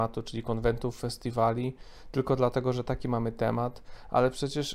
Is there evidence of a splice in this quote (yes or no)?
no